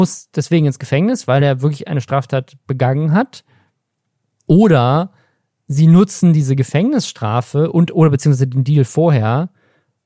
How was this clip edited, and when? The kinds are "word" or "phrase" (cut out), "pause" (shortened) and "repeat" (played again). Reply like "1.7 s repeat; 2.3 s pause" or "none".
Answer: none

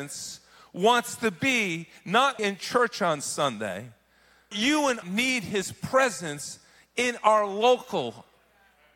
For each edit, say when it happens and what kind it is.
2.4 s word; 4.5 s word; 5.0 s word

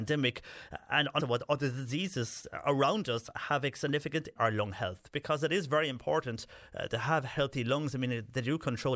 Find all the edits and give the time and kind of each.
1.2 s word; 4.4 s phrase

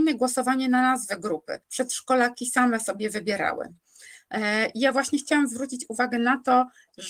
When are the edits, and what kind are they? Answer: 1.6 s pause

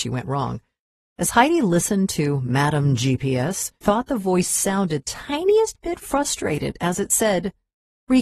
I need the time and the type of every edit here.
3.8 s word; 5.0 s word

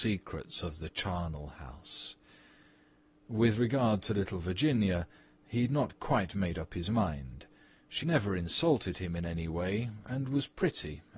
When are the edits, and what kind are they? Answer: 8.0 s word

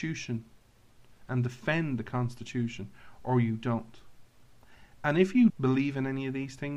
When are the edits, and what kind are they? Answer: 5.5 s word

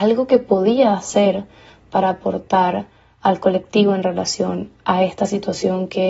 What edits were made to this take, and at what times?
none

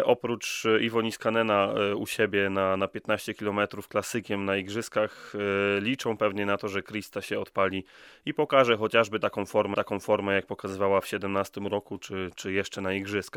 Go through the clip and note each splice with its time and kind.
9.7 s repeat

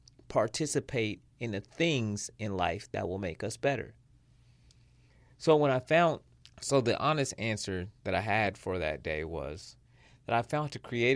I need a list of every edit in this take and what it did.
6.3 s pause

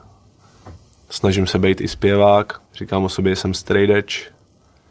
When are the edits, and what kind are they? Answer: 2.7 s pause

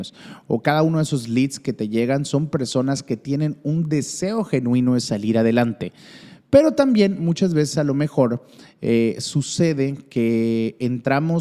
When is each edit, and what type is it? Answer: none

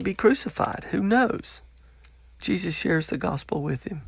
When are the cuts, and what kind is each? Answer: 2.4 s word

